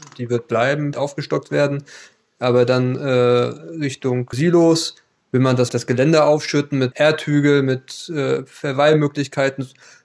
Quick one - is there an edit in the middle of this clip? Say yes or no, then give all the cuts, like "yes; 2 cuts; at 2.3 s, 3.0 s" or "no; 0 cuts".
yes; 4 cuts; at 0.9 s, 4.3 s, 5.7 s, 6.9 s